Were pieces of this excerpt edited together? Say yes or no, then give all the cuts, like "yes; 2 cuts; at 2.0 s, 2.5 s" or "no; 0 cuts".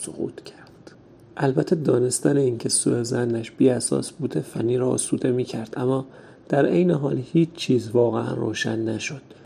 no; 0 cuts